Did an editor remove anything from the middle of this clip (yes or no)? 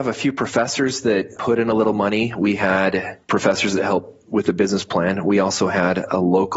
yes